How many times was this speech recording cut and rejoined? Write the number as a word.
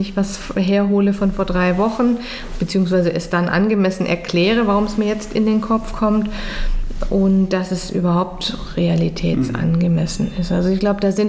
zero